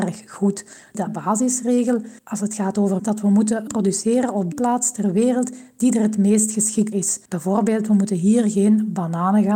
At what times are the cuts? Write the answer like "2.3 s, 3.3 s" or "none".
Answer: 1.1 s, 2.2 s, 3.0 s, 3.7 s, 4.5 s, 6.9 s